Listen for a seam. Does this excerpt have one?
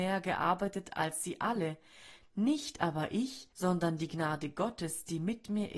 yes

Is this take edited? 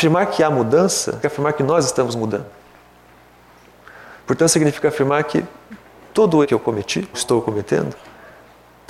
yes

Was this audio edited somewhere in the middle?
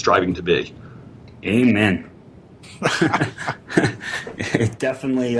yes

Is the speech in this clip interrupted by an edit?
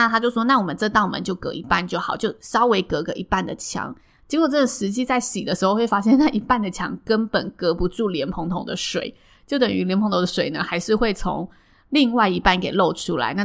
no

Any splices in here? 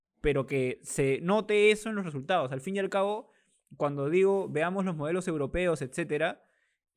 no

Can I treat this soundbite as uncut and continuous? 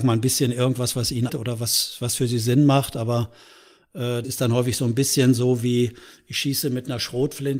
no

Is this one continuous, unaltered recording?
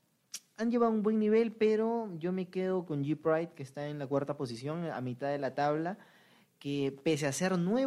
yes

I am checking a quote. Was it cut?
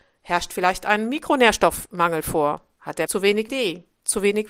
yes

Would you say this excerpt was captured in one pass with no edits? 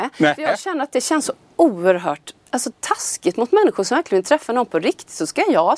no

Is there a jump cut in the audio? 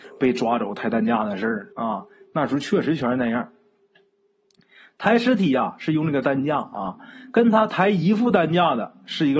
yes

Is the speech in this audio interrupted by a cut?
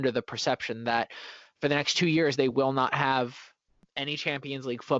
no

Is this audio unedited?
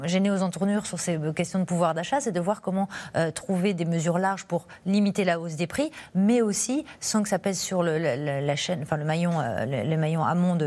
yes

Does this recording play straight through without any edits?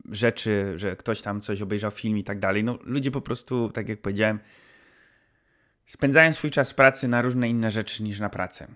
yes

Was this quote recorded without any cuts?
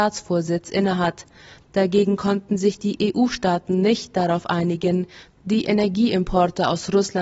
yes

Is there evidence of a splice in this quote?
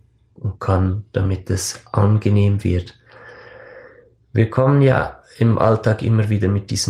no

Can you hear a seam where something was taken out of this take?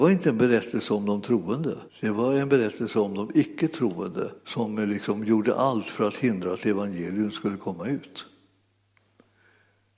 yes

